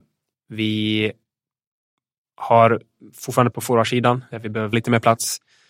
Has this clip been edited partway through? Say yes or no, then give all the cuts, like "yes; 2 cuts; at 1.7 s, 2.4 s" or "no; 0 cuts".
yes; 3 cuts; at 3.5 s, 4.3 s, 4.7 s